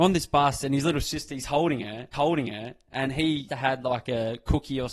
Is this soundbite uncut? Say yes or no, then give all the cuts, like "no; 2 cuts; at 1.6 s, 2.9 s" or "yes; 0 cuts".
no; 2 cuts; at 2.1 s, 3.5 s